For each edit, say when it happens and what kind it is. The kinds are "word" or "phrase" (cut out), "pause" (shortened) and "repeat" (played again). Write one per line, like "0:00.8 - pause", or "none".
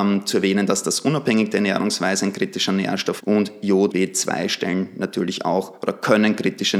0:03.2 - word
0:03.9 - word